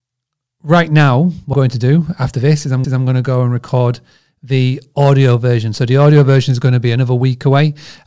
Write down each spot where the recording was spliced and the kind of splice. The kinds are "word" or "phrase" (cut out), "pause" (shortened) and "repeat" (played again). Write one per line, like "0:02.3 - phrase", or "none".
0:01.5 - word
0:02.8 - repeat